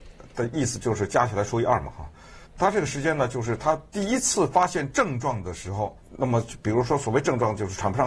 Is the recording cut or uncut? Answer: cut